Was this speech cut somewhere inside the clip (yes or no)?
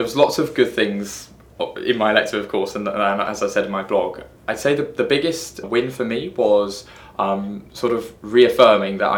yes